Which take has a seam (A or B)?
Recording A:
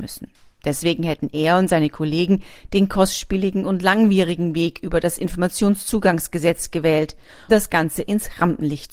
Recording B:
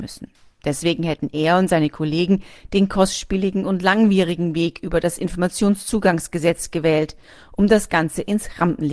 A